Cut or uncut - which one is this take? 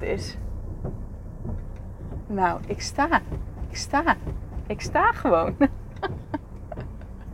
cut